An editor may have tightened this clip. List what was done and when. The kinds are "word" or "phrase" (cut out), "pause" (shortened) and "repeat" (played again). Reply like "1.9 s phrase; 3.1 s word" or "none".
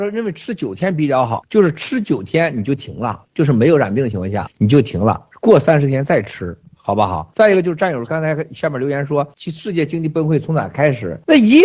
3.2 s pause